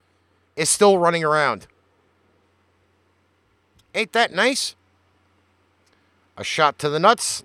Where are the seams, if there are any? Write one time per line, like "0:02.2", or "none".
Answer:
none